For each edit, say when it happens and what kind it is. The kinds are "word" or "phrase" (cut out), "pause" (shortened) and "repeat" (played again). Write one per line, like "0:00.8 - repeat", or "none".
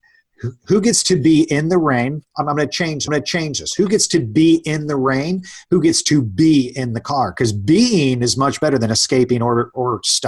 0:03.1 - repeat